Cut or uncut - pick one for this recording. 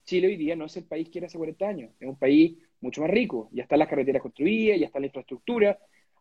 uncut